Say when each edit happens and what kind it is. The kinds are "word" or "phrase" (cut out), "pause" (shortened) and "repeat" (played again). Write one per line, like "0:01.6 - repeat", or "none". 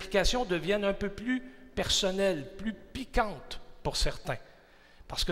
none